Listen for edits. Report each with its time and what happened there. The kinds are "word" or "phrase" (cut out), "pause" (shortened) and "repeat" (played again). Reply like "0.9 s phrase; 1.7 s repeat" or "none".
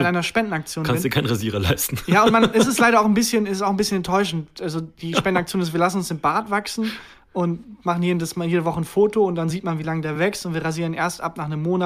none